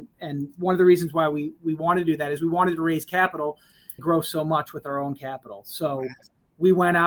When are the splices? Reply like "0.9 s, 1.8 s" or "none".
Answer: 4.0 s